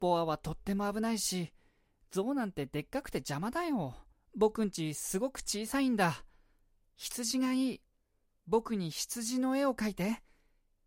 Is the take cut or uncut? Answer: cut